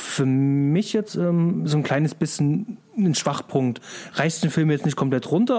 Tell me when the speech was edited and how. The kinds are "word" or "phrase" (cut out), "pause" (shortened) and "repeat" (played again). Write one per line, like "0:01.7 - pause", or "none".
none